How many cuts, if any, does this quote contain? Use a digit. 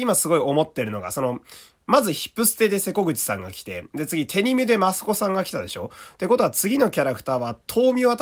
0